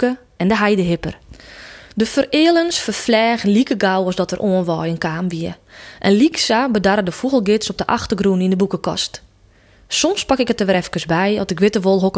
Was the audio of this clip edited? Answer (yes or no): no